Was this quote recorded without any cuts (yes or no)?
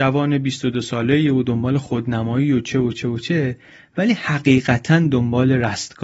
yes